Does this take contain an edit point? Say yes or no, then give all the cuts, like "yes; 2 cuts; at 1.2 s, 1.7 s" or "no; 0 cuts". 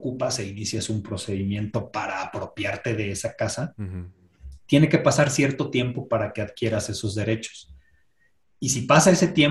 no; 0 cuts